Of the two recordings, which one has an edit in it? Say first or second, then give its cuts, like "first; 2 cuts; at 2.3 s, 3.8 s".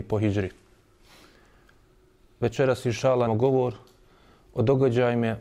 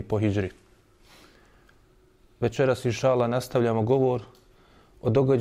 first; 1 cut; at 3.3 s